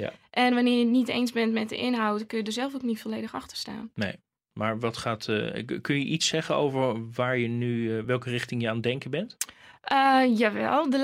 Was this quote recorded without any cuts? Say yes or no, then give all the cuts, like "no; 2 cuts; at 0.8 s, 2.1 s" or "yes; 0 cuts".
yes; 0 cuts